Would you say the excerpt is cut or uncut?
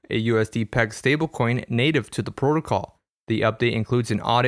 uncut